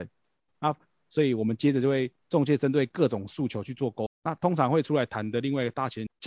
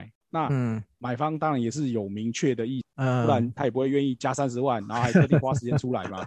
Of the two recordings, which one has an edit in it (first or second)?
first